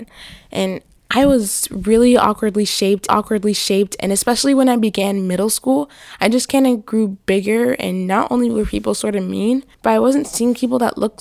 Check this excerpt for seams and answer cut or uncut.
cut